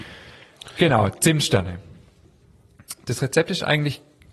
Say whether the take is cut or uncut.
uncut